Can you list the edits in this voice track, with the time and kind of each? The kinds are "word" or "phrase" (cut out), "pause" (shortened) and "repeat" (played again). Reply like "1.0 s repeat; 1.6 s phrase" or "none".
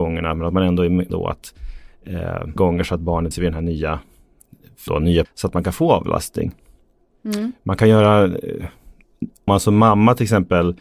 1.1 s word; 2.6 s word; 3.3 s word; 4.9 s word; 5.2 s word; 9.5 s word